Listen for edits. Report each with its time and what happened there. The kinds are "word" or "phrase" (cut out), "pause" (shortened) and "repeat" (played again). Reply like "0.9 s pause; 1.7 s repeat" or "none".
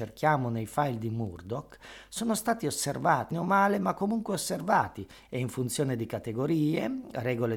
3.3 s word